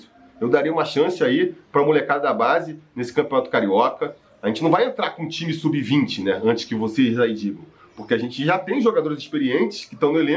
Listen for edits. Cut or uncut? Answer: uncut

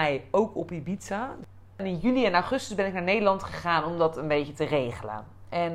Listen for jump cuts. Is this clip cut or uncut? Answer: uncut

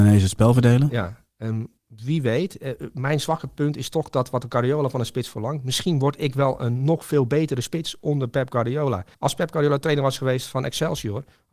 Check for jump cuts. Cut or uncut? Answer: cut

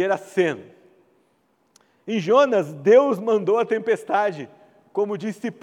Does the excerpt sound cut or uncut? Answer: uncut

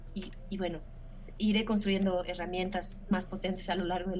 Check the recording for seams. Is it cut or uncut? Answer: uncut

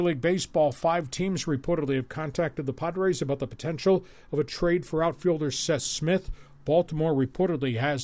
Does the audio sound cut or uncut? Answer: uncut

